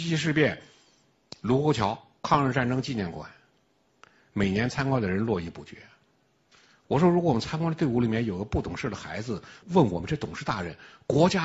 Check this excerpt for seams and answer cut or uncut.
cut